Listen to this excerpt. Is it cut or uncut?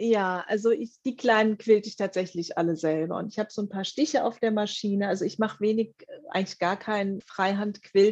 uncut